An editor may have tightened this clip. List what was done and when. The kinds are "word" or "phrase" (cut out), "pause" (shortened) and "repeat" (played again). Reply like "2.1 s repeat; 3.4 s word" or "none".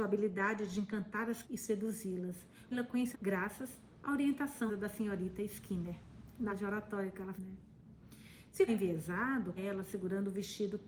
1.4 s word; 2.7 s word; 3.1 s word; 4.7 s word; 6.5 s word; 7.4 s word; 8.7 s word; 9.6 s word